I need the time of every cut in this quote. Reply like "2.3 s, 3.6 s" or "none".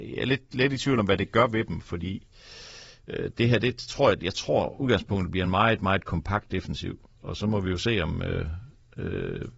none